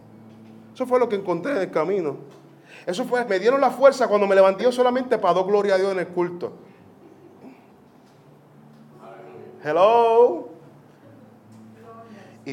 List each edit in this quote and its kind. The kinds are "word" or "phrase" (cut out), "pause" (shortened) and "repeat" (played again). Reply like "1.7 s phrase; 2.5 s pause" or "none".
3.3 s phrase; 4.6 s phrase